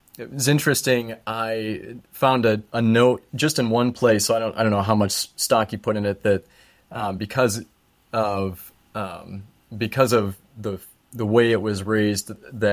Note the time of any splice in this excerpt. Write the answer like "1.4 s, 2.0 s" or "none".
none